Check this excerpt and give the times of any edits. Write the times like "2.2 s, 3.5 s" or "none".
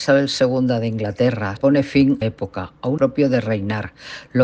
1.6 s, 2.2 s, 3.0 s